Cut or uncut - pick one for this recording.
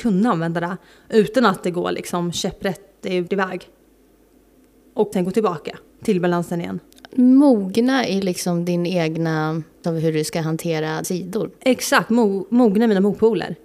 cut